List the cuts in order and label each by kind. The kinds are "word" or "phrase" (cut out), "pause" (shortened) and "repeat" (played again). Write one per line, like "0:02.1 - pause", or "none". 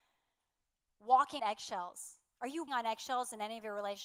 0:01.4 - word
0:02.7 - word